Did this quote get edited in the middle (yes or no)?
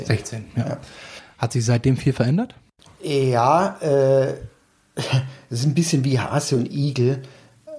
no